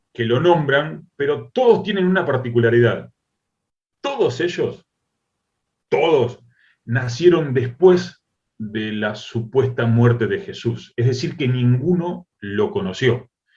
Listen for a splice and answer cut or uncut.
uncut